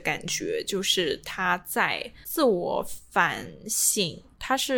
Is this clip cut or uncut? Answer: cut